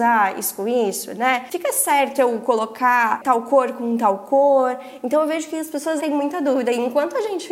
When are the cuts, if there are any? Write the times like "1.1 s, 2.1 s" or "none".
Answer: 2.2 s, 6.0 s